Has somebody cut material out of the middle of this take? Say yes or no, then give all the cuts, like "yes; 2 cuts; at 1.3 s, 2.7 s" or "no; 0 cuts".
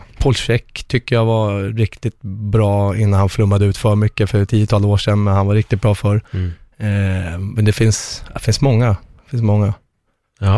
yes; 2 cuts; at 4.5 s, 6.3 s